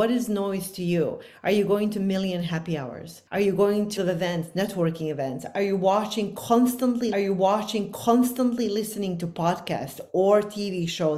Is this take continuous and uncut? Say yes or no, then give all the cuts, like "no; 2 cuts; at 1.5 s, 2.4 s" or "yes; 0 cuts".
no; 3 cuts; at 3.3 s, 4.0 s, 7.1 s